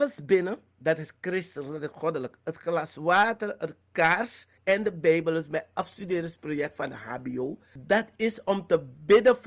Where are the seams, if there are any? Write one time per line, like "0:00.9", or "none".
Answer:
0:04.6